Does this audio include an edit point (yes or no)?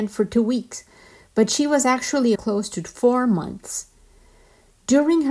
yes